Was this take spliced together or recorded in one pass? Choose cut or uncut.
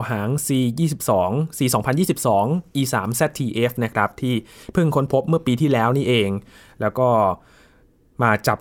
uncut